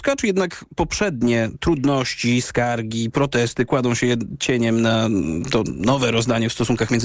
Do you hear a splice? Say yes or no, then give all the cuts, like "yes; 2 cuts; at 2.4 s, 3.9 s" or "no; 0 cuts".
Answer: no; 0 cuts